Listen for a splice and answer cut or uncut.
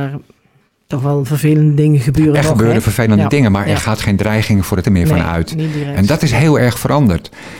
cut